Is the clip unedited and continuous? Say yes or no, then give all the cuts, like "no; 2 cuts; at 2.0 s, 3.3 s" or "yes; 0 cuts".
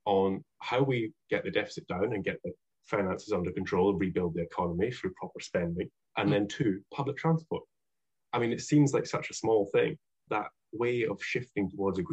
no; 1 cut; at 10.3 s